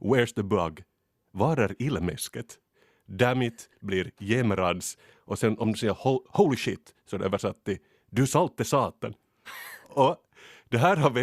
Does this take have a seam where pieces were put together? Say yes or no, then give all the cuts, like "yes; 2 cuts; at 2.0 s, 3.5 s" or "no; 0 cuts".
no; 0 cuts